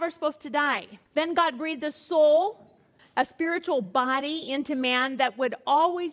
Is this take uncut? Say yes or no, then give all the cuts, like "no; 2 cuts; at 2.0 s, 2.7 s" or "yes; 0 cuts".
yes; 0 cuts